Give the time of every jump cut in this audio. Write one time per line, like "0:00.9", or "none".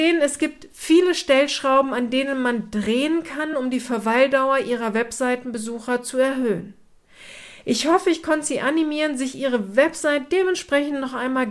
none